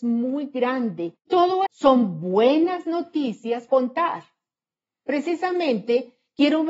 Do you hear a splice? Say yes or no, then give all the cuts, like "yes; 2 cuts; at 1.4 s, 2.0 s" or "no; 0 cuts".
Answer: yes; 3 cuts; at 1.3 s, 1.7 s, 3.7 s